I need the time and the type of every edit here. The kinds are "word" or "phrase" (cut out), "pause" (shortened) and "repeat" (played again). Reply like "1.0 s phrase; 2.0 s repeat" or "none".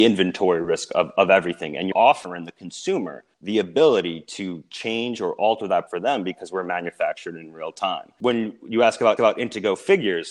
1.9 s word; 3.3 s pause; 5.9 s phrase; 9.2 s repeat